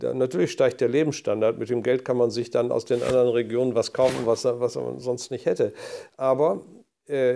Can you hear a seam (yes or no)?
no